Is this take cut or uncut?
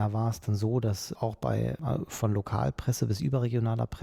cut